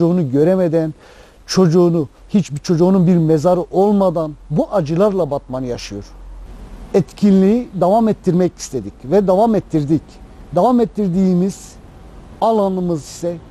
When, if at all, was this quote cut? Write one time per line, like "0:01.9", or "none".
0:02.2
0:04.4